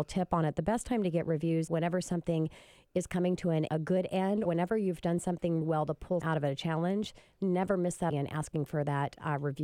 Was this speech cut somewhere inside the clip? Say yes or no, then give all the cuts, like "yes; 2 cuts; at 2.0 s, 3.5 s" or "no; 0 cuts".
yes; 6 cuts; at 1.7 s, 3.7 s, 4.5 s, 5.6 s, 6.2 s, 8.1 s